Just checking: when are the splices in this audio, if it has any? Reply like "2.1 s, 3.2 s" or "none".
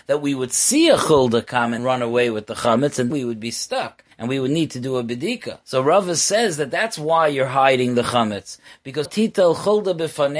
1.8 s, 3.1 s, 4.1 s, 5.6 s, 9.0 s